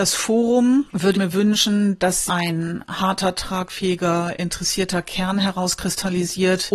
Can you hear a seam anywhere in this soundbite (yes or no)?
yes